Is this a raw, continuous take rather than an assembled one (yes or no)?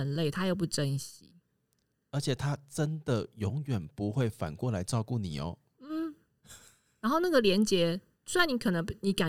yes